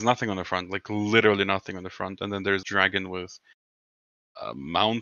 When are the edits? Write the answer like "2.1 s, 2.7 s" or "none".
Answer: 2.6 s

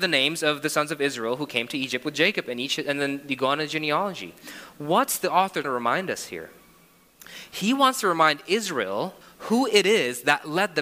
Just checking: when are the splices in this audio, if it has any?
5.6 s, 9.2 s

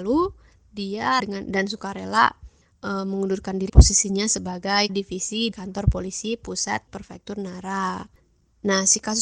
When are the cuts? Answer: 1.2 s, 2.7 s, 3.7 s, 4.9 s, 5.5 s, 6.9 s

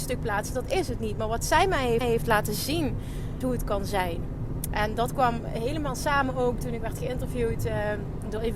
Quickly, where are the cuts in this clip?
2.0 s, 3.4 s, 6.8 s

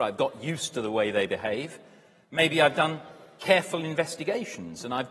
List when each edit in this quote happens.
none

